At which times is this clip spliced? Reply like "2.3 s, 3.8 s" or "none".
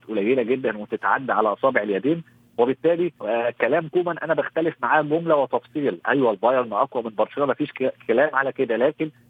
3.2 s